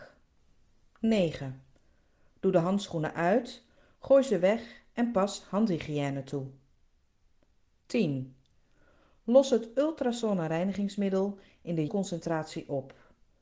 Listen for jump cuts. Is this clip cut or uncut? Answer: cut